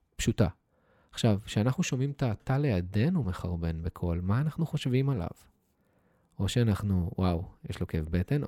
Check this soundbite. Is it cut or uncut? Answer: uncut